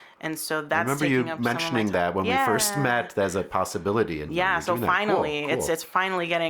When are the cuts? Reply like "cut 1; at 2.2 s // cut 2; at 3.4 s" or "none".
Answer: cut 1; at 4.3 s